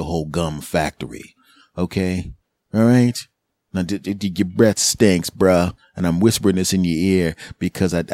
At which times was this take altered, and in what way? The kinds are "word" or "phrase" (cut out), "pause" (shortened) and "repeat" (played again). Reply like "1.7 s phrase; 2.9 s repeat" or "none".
none